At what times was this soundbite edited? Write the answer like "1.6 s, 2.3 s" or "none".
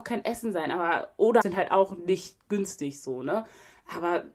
1.4 s